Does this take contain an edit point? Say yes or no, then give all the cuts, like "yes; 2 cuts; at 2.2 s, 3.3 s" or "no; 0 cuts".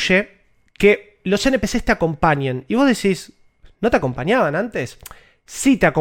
no; 0 cuts